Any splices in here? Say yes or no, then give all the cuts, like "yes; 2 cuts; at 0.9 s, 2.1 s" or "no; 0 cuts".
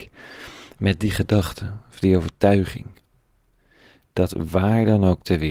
no; 0 cuts